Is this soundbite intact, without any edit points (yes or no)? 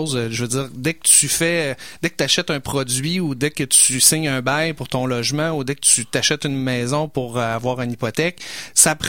yes